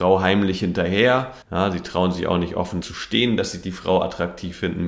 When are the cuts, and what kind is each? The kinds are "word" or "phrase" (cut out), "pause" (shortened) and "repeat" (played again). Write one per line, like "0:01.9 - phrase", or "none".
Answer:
0:01.4 - pause
0:02.8 - word